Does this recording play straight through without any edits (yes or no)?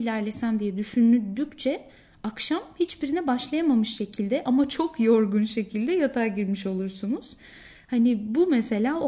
yes